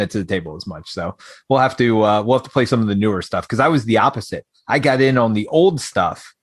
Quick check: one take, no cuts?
yes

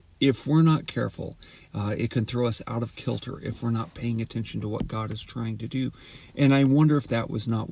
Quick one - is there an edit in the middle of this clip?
no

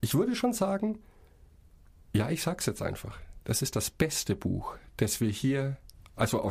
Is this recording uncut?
yes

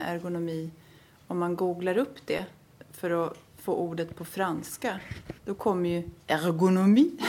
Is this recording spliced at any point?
no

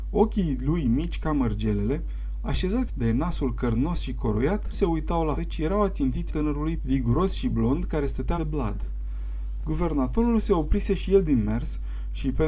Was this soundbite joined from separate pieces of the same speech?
yes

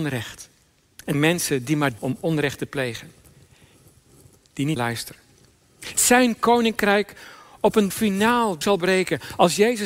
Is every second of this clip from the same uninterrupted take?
no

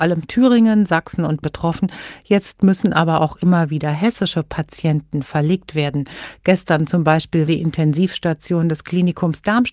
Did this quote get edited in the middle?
yes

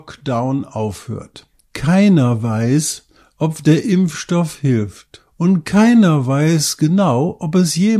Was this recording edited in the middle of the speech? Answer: no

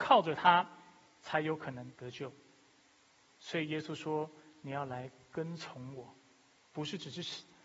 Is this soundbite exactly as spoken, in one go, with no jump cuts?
no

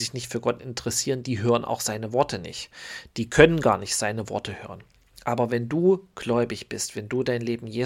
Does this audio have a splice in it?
no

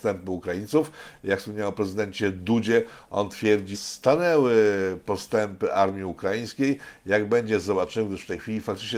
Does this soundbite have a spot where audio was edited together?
yes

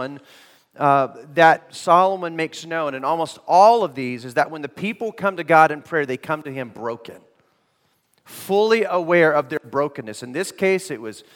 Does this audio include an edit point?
no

